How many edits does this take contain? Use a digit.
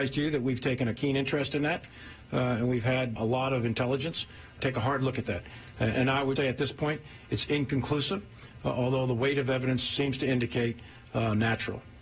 3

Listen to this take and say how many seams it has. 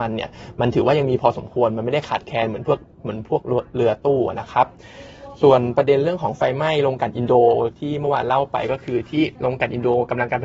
1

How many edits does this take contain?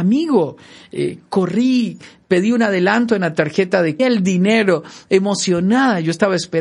1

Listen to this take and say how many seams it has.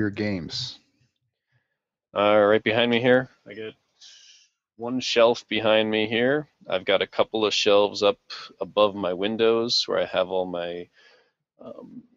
0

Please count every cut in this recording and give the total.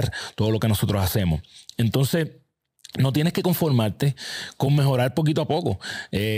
0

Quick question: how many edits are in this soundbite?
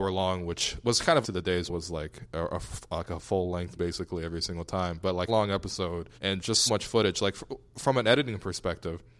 6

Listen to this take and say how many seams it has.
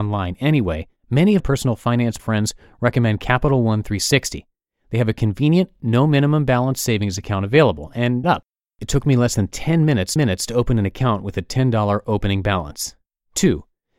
6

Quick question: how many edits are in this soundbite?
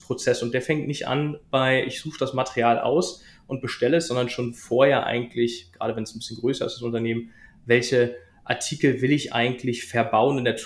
0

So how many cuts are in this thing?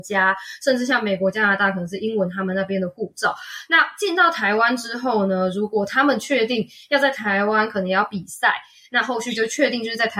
0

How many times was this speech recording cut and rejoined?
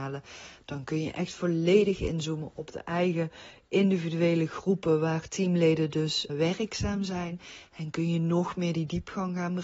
1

